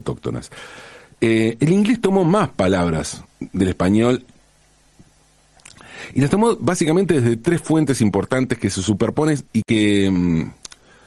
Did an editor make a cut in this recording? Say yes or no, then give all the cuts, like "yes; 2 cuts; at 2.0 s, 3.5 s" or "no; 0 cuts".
yes; 2 cuts; at 3.3 s, 9.5 s